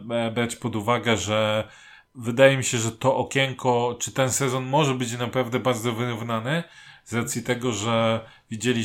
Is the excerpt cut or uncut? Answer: uncut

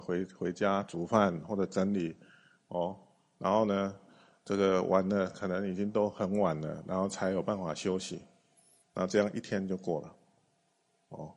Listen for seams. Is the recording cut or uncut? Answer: uncut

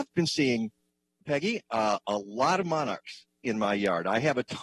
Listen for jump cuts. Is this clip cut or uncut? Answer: uncut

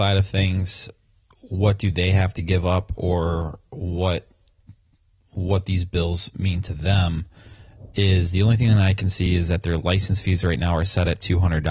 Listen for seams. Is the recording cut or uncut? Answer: uncut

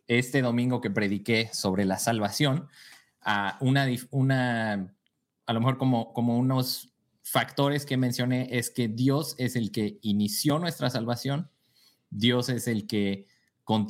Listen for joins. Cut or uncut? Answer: uncut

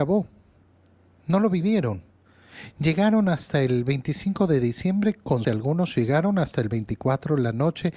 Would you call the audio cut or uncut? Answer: cut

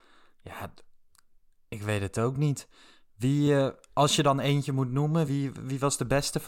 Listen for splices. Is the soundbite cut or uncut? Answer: uncut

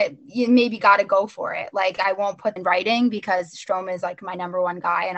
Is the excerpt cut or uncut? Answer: cut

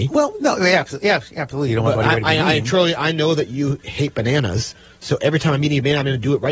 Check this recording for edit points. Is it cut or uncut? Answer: uncut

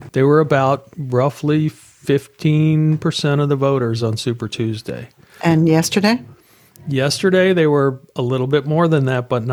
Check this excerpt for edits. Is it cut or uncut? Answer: uncut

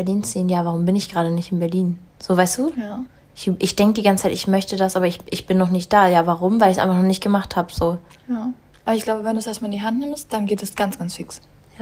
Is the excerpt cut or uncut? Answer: uncut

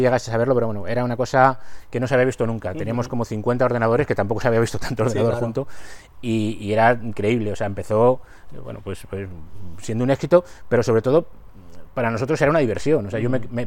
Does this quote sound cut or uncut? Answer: uncut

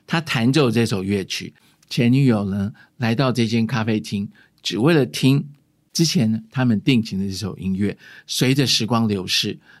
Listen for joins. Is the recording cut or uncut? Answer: uncut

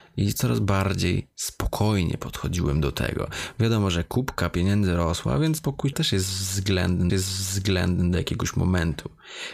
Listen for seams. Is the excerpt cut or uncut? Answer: cut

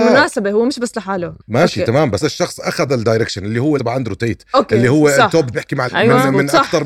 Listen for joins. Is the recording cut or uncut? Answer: cut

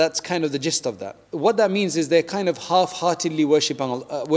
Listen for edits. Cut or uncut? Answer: cut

